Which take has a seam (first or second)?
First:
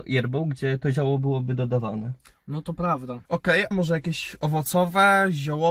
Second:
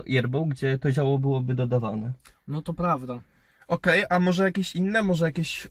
first